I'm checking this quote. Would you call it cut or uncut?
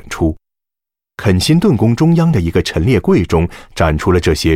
uncut